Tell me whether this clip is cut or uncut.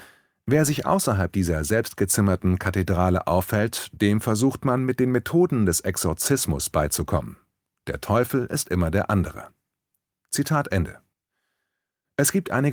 uncut